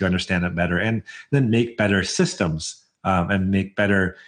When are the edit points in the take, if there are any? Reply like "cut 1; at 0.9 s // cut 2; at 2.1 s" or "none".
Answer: none